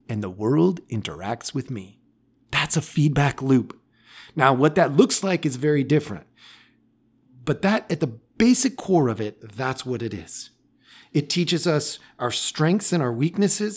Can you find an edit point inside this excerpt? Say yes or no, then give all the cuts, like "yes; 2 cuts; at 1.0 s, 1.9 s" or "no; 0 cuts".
no; 0 cuts